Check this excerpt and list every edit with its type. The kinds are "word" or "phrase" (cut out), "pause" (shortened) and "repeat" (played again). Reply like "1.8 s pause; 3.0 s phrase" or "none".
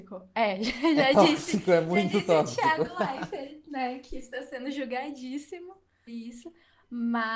6.1 s word